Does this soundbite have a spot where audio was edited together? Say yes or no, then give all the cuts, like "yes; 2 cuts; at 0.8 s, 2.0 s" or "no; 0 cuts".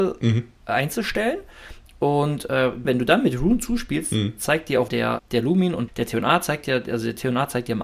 yes; 4 cuts; at 2.8 s, 4.9 s, 5.2 s, 5.9 s